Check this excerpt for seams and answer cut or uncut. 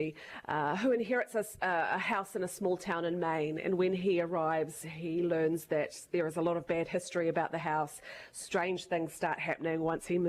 uncut